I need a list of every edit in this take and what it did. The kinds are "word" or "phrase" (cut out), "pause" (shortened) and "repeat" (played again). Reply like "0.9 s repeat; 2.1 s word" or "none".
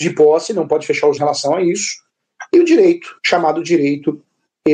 1.2 s word; 3.2 s pause